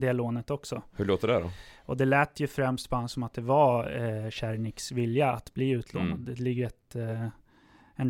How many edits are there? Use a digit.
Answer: 0